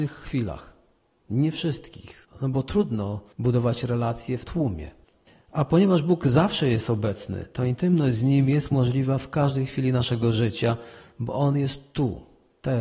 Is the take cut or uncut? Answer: uncut